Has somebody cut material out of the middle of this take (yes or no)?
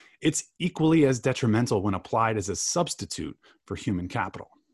no